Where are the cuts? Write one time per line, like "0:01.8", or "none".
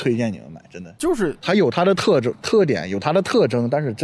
0:01.0